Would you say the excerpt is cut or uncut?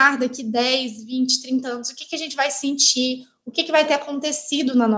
uncut